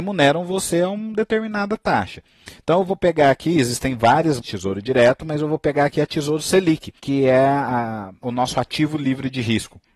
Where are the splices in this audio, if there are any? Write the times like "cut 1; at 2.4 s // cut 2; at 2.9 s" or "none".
cut 1; at 4.4 s // cut 2; at 7.0 s // cut 3; at 8.2 s